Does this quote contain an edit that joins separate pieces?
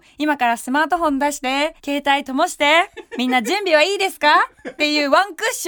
yes; 1 cut; at 1.8 s

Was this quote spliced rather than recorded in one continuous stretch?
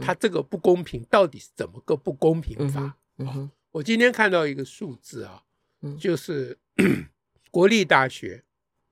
yes; 1 cut; at 7.5 s

